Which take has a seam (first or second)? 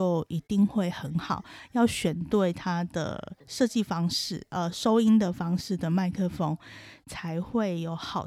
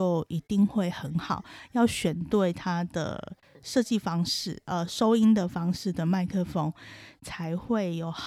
first